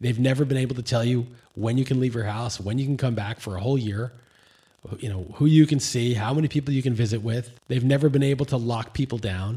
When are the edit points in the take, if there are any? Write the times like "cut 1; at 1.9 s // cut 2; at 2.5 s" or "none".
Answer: cut 1; at 7.6 s